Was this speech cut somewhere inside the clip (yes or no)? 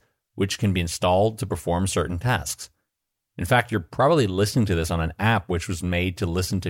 no